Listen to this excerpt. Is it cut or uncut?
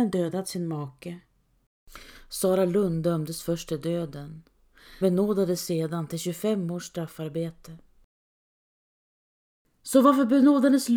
cut